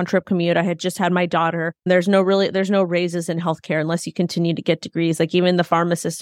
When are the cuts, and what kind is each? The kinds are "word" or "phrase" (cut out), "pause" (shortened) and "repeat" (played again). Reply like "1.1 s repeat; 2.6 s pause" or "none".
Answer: none